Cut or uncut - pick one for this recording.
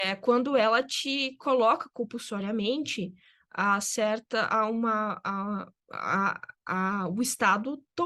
uncut